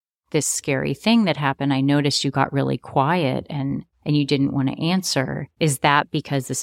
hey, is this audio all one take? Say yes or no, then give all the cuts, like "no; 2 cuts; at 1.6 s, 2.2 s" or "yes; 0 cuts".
yes; 0 cuts